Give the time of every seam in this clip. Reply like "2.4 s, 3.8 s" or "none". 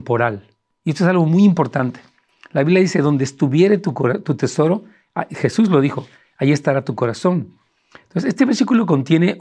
none